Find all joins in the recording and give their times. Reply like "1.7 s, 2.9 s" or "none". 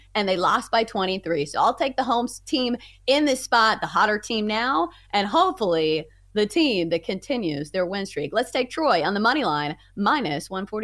none